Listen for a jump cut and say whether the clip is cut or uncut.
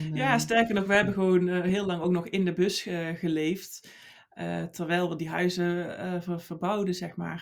uncut